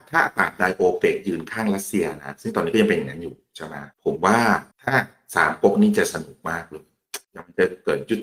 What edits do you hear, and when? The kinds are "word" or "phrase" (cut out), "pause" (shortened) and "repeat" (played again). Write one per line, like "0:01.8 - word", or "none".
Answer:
0:03.9 - pause
0:04.7 - pause
0:07.2 - pause